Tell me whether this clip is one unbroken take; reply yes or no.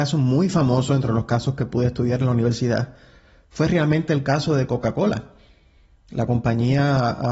yes